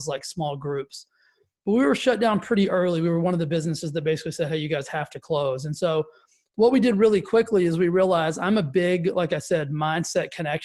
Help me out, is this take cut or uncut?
uncut